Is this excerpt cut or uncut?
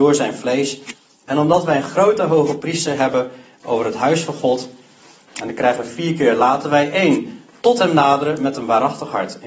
cut